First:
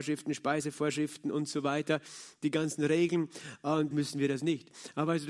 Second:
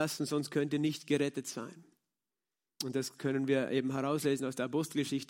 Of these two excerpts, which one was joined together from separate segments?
first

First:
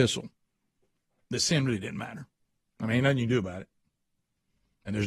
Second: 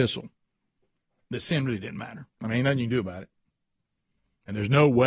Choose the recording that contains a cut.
second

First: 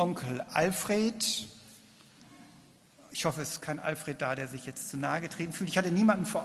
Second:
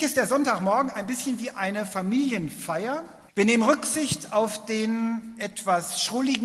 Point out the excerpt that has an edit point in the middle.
second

